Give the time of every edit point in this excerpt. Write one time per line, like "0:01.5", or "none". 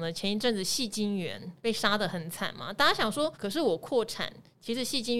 0:01.6
0:03.3